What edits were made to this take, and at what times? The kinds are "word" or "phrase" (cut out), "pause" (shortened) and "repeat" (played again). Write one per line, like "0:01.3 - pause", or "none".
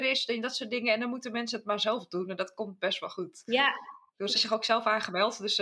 0:04.3 - word